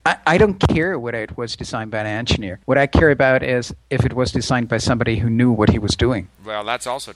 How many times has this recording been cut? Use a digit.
1